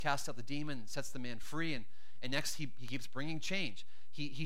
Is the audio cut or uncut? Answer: uncut